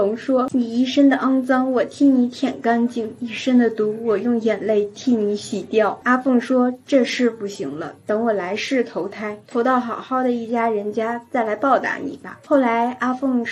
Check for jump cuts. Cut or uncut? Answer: cut